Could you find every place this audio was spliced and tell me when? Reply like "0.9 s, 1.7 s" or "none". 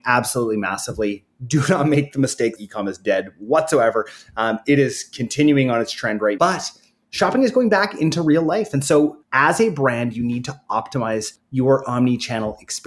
2.6 s, 6.4 s, 9.2 s